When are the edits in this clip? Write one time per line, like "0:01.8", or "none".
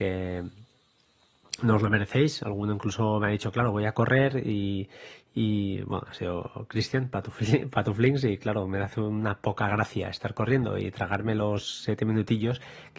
none